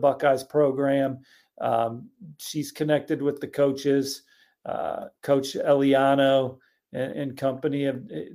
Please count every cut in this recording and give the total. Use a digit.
2